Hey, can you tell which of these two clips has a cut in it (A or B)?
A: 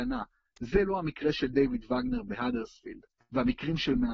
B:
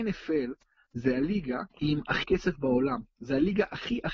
B